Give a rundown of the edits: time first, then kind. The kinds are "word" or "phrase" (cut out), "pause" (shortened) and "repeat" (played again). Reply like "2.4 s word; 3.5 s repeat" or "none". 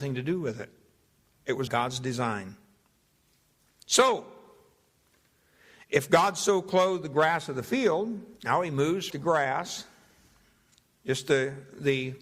1.7 s phrase; 8.4 s pause; 9.1 s phrase